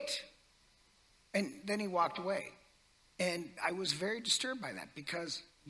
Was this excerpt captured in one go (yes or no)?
no